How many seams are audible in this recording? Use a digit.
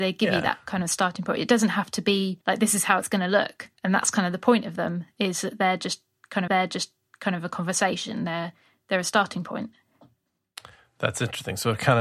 3